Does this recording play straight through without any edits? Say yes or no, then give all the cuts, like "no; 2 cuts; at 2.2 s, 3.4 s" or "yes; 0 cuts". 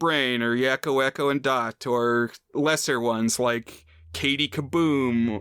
yes; 0 cuts